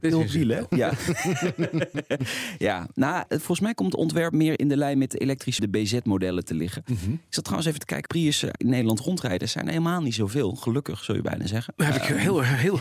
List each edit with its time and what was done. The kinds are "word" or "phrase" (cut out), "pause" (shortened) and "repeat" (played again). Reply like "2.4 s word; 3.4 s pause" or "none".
4.6 s word; 5.6 s word; 8.1 s word